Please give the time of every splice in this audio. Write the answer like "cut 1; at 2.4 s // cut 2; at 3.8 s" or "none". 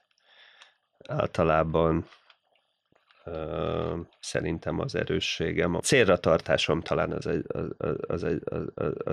cut 1; at 8.2 s